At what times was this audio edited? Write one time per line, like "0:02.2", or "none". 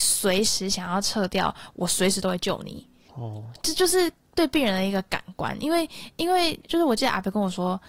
0:06.6